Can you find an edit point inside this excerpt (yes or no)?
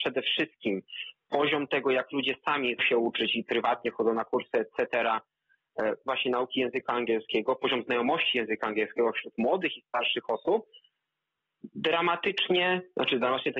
yes